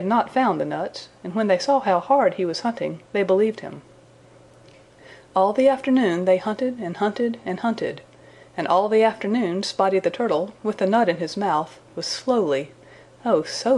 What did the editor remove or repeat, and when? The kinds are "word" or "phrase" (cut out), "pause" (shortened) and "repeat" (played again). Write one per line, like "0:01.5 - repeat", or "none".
none